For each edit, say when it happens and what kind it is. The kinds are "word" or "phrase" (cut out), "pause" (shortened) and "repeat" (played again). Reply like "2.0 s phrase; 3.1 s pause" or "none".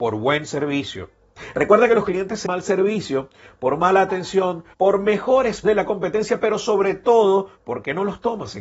2.4 s phrase; 4.7 s pause; 5.6 s word; 7.6 s pause